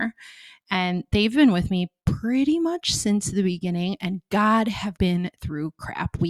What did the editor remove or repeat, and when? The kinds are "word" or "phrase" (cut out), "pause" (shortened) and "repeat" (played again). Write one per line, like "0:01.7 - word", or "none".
0:05.0 - word